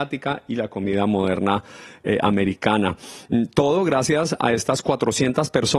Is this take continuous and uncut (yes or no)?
yes